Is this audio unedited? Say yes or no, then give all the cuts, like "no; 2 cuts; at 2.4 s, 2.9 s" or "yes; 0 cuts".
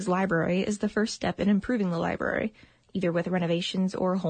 yes; 0 cuts